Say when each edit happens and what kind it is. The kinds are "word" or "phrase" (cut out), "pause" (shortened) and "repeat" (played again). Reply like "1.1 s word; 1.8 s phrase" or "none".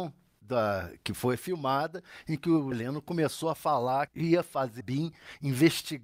2.7 s word; 4.1 s word; 4.8 s word